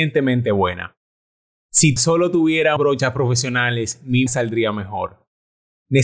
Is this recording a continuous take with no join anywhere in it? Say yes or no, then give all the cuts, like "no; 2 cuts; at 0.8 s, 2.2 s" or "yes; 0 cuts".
no; 3 cuts; at 2.0 s, 2.8 s, 4.3 s